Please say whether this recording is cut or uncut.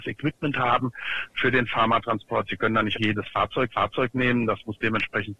cut